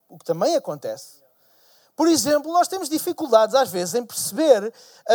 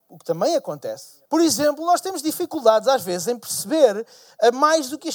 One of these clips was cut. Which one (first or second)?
second